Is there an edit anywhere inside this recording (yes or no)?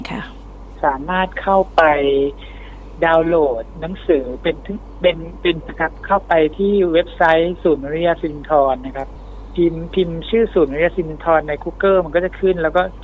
yes